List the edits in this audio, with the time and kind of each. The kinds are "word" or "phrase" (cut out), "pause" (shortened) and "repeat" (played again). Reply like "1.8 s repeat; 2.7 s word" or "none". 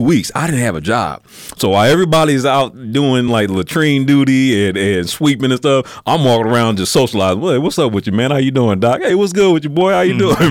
none